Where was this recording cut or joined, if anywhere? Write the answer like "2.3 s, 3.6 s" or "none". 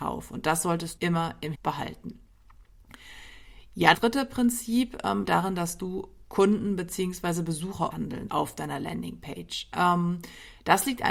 1.0 s, 1.5 s, 3.9 s, 5.2 s, 7.9 s, 8.3 s